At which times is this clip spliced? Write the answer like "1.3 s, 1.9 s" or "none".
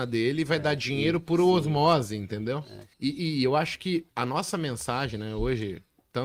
2.9 s, 4.1 s